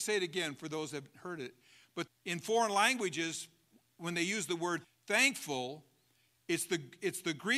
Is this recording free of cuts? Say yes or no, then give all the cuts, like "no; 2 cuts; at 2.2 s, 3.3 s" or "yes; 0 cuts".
no; 2 cuts; at 2.1 s, 4.8 s